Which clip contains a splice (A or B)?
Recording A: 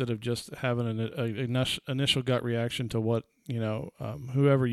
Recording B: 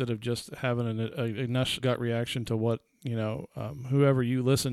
B